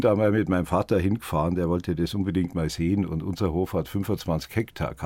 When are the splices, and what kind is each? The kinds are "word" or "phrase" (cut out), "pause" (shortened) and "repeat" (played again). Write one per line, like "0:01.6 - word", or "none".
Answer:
none

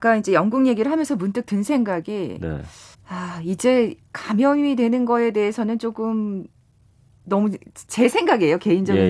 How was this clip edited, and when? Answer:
0:02.9 - pause
0:07.9 - pause

